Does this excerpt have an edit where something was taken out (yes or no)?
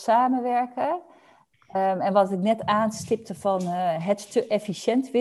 no